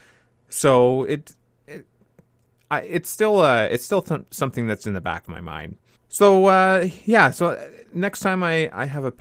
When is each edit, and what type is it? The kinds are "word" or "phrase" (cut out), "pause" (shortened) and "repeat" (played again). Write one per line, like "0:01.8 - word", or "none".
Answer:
none